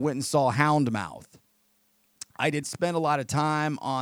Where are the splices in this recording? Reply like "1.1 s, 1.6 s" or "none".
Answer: 2.6 s